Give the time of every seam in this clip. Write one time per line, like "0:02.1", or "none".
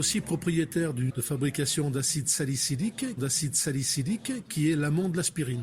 0:01.1
0:03.2